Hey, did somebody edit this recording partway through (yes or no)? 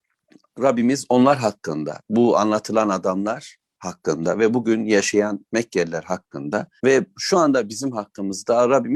yes